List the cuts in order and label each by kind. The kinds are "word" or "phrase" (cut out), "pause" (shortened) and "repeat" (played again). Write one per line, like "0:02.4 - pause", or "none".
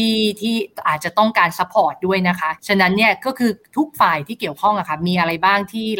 0:02.6 - pause